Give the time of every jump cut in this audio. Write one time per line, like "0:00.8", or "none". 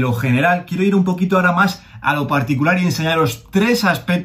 none